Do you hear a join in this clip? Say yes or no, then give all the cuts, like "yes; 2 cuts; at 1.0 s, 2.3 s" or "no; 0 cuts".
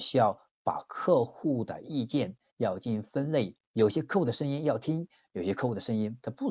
no; 0 cuts